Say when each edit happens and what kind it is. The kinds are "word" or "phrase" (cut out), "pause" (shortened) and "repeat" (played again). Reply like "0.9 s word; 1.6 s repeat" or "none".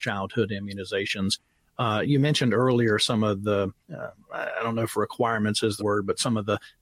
2.0 s word; 3.8 s pause; 5.8 s word

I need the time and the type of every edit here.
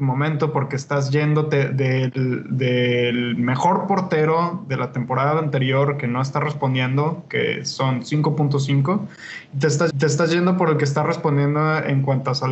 9.9 s repeat

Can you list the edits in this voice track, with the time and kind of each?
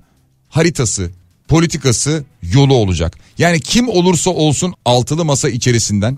4.7 s word

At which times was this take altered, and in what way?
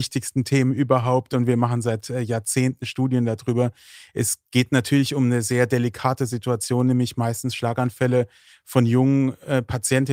none

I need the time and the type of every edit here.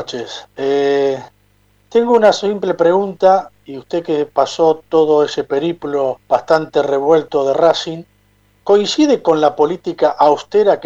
6.2 s pause; 8.6 s word

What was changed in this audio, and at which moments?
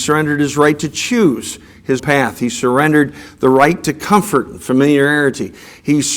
2.0 s word

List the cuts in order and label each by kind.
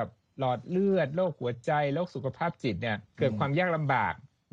3.1 s pause

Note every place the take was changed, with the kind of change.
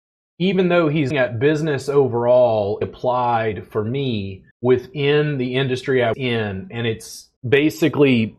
1.1 s word; 2.8 s word; 4.5 s pause; 6.1 s word; 7.4 s pause

